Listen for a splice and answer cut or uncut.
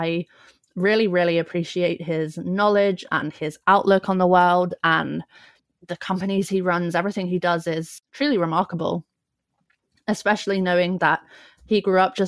uncut